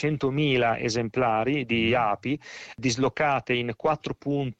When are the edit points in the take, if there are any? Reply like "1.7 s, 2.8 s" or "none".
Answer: none